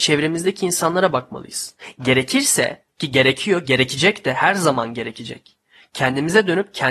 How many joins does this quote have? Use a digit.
0